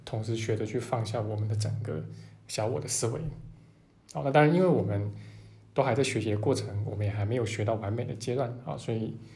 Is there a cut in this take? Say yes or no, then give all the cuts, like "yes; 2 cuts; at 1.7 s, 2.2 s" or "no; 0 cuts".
no; 0 cuts